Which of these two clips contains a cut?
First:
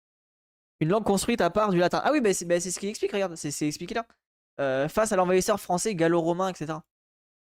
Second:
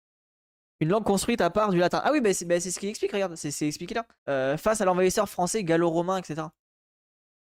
second; 1 cut; at 4.2 s

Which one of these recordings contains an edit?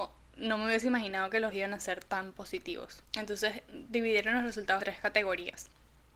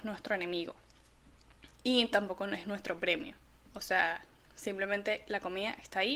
first; 3 cuts; at 1.5 s, 3.0 s, 4.8 s

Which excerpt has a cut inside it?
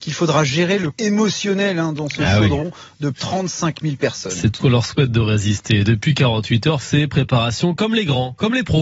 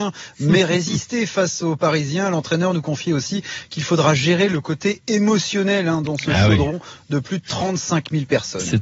first; 4 cuts; at 0.9 s, 3.1 s, 4.6 s, 6.8 s

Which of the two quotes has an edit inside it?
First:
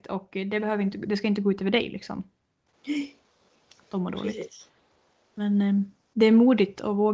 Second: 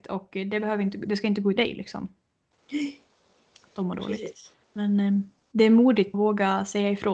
second; 3 cuts; at 1.6 s, 4.6 s, 6.1 s

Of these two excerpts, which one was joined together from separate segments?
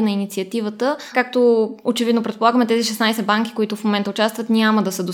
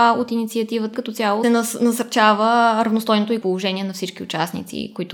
second; 3 cuts; at 0.9 s, 1.4 s, 3.4 s

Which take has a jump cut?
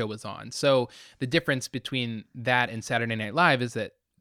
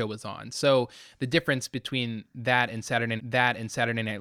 second; 1 cut; at 3.2 s

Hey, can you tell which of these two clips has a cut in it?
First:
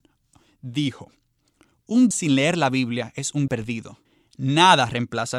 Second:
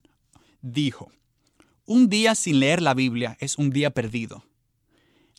first; 3 cuts; at 2.1 s, 3.5 s, 4.1 s

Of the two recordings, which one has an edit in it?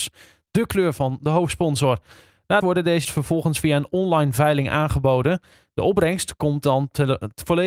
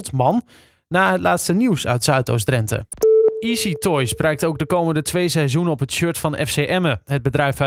first; 2 cuts; at 2.6 s, 3.0 s

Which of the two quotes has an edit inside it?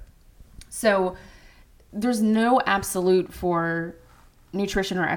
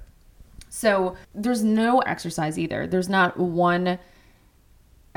second; 2 cuts; at 1.2 s, 2.1 s

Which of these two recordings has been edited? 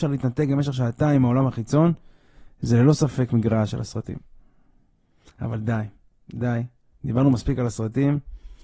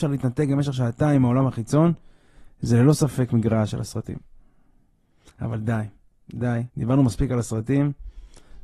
second; 1 cut; at 6.7 s

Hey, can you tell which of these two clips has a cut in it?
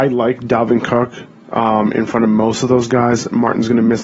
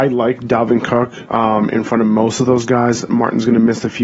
second; 1 cut; at 1.3 s

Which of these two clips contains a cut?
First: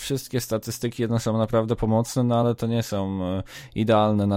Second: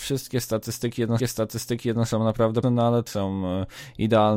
second; 3 cuts; at 1.2 s, 2.6 s, 3.1 s

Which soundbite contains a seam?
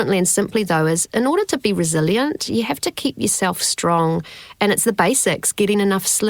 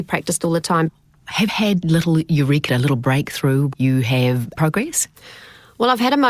second; 5 cuts; at 1.5 s, 1.8 s, 2.7 s, 3.7 s, 4.5 s

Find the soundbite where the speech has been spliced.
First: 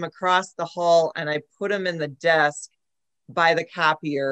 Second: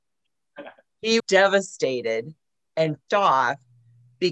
second; 2 cuts; at 1.2 s, 3.1 s

